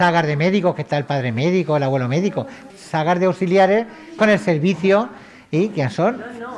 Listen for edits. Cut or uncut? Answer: cut